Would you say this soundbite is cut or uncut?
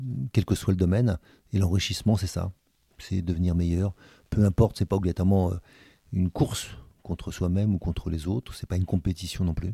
uncut